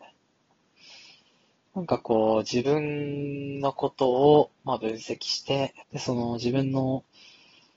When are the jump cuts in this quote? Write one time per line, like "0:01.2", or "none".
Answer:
0:04.6
0:05.8